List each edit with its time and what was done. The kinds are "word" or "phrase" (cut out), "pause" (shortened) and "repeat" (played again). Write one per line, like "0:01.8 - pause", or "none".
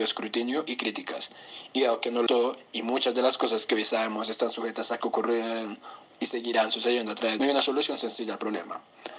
0:02.3 - word
0:05.0 - word
0:07.4 - phrase